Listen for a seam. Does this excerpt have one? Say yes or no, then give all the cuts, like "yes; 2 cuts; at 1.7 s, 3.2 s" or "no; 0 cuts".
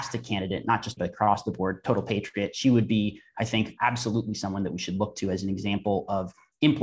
yes; 2 cuts; at 1.0 s, 3.8 s